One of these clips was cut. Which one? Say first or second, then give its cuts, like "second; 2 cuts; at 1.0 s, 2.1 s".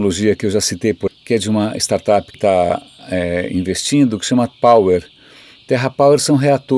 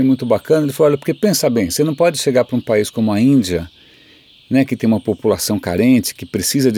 first; 3 cuts; at 1.1 s, 2.3 s, 4.5 s